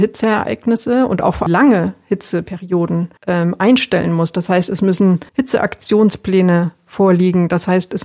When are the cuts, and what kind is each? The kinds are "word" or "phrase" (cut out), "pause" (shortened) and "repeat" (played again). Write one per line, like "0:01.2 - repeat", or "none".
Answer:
0:01.5 - phrase
0:03.2 - pause
0:05.3 - pause

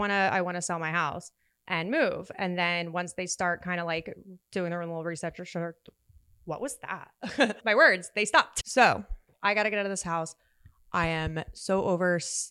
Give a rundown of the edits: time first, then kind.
none

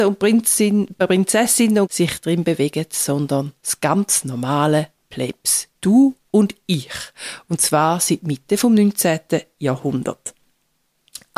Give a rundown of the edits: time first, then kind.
0:01.8 - phrase
0:03.6 - pause

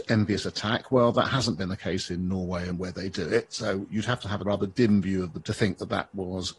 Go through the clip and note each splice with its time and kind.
0:02.7 - phrase
0:04.4 - phrase
0:05.4 - word

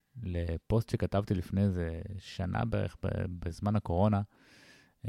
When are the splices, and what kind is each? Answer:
none

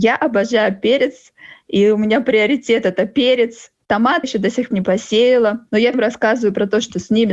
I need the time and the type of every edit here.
0:04.2 - word
0:04.7 - word
0:05.9 - word

